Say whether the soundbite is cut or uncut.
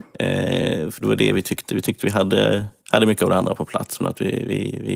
cut